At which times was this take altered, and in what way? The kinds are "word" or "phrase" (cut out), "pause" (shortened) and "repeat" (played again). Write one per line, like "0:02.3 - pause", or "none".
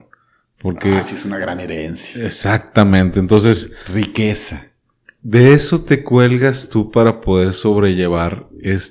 none